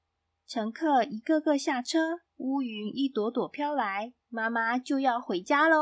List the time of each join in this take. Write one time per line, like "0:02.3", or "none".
0:02.3
0:04.2

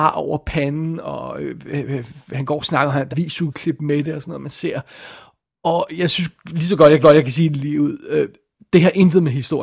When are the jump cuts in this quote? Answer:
0:03.1
0:07.0

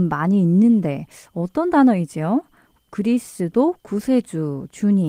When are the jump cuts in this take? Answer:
none

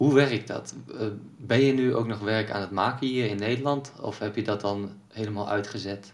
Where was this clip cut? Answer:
none

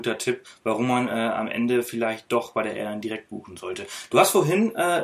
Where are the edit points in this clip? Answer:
none

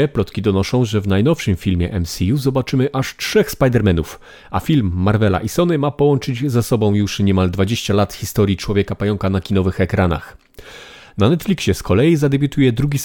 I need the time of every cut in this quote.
none

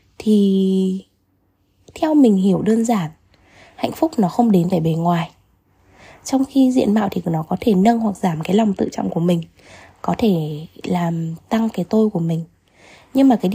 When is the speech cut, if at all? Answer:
0:04.7

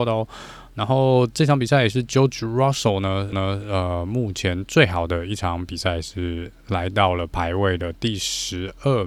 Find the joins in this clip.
0:03.3

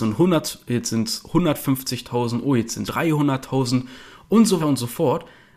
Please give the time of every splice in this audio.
0:02.9
0:04.6

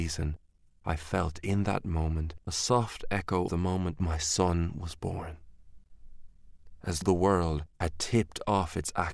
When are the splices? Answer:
0:02.4
0:03.5
0:07.0
0:07.7

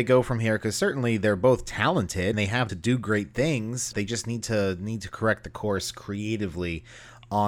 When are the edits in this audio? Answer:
0:02.3
0:02.7
0:03.9

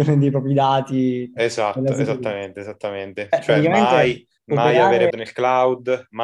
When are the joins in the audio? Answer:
0:04.4
0:05.1

